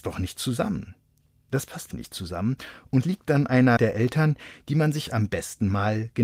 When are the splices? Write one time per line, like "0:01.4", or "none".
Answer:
0:01.2
0:01.9
0:03.0
0:03.8

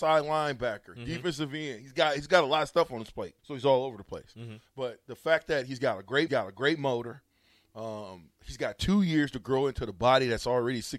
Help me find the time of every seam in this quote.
0:03.4
0:06.3

